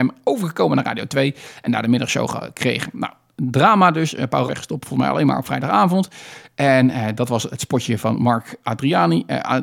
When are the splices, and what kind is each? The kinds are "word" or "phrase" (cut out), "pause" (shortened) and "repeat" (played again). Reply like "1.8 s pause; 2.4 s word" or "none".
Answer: 4.5 s phrase